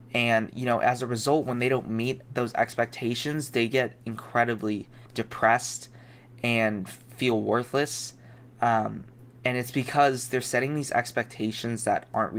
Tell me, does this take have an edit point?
yes; 2 cuts; at 5.1 s, 9.2 s

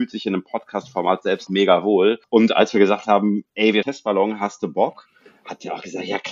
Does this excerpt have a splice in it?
yes; 3 cuts; at 1.5 s, 3.5 s, 3.8 s

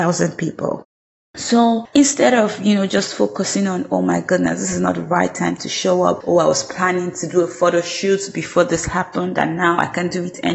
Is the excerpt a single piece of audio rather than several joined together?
yes; 0 cuts

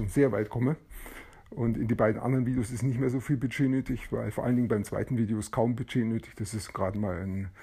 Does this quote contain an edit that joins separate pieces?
no; 0 cuts

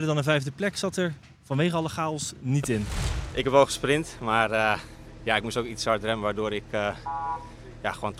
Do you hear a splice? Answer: no; 0 cuts

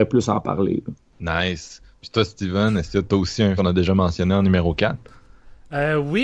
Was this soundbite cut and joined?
yes; 2 cuts; at 3.1 s, 3.6 s

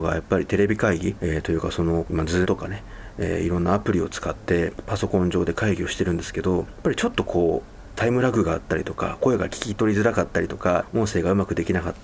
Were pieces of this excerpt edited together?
yes; 1 cut; at 2.4 s

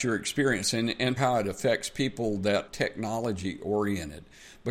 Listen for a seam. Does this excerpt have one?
yes; 2 cuts; at 1.2 s, 2.7 s

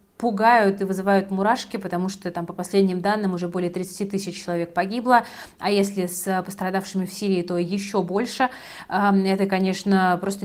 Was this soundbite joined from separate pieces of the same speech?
no; 0 cuts

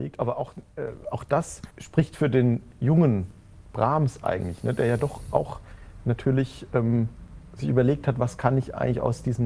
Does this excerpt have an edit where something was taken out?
yes; 1 cut; at 1.7 s

